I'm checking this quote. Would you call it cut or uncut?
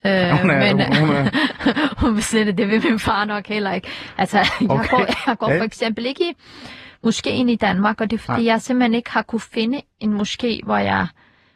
uncut